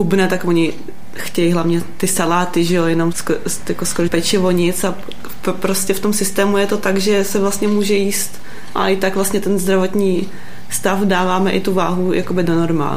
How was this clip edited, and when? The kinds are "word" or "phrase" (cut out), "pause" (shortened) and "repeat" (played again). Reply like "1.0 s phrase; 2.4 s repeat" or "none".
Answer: 3.1 s word; 4.1 s word; 8.8 s word